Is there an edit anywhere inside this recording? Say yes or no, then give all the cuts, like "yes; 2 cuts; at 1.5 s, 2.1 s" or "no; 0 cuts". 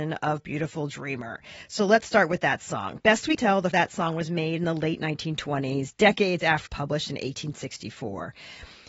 yes; 3 cuts; at 3.4 s, 3.7 s, 6.7 s